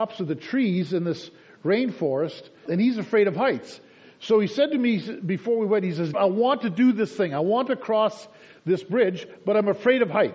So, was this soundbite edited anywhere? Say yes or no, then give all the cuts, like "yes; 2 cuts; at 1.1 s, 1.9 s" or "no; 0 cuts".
yes; 2 cuts; at 2.7 s, 6.1 s